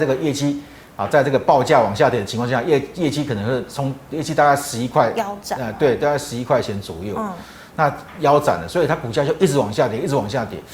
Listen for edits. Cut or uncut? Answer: uncut